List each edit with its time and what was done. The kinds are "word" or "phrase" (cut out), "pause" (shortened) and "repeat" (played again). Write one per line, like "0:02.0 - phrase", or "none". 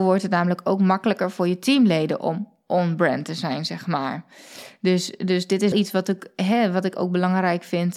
0:05.7 - word